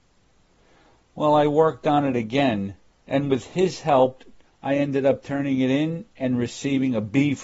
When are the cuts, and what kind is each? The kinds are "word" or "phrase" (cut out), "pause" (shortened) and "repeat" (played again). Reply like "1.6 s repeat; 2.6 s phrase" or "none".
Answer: 2.9 s pause; 4.4 s pause